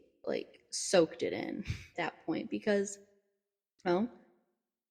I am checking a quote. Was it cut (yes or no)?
yes